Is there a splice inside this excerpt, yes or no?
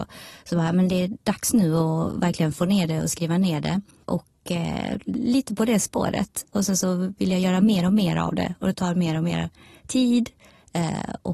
no